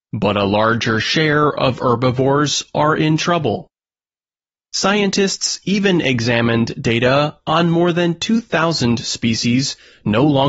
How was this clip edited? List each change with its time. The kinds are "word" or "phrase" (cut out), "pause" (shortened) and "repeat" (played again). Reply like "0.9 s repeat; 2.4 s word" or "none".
none